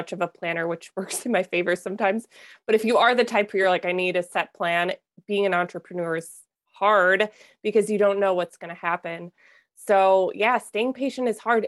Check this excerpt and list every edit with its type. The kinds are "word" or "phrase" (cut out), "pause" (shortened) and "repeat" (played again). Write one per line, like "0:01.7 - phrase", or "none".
none